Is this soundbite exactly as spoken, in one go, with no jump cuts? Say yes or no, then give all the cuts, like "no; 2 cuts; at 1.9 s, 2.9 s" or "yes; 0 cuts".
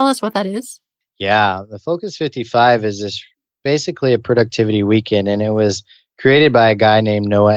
yes; 0 cuts